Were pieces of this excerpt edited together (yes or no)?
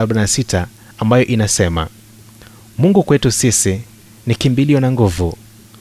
no